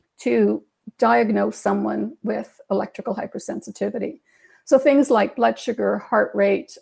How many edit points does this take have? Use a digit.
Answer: 0